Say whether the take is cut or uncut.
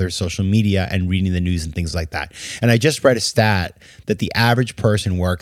uncut